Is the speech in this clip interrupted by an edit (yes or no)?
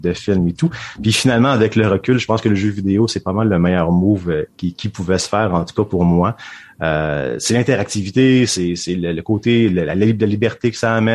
no